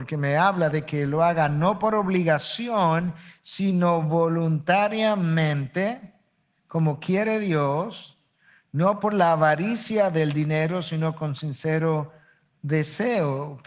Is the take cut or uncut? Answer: uncut